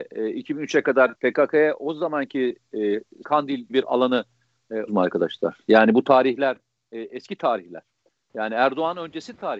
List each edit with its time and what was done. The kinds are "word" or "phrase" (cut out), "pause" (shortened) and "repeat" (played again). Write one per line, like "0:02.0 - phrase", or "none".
0:01.1 - word
0:03.2 - word
0:03.7 - word
0:04.9 - word